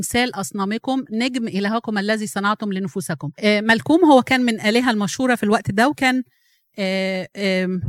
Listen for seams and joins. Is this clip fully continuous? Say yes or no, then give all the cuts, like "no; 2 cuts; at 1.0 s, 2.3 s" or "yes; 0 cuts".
no; 1 cut; at 3.3 s